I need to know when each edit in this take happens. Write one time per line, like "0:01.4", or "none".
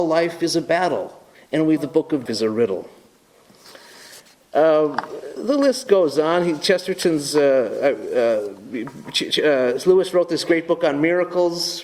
0:01.3
0:01.8
0:02.3
0:05.4